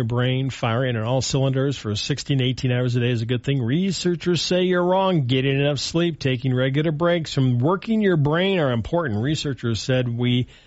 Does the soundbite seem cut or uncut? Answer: uncut